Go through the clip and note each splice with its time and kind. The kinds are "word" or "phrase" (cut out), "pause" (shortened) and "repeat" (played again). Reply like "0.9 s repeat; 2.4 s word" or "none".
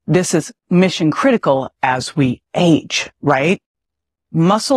3.1 s pause